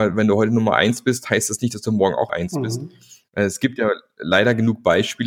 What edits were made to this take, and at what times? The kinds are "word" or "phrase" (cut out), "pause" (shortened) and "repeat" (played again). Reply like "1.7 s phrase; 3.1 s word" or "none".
2.3 s word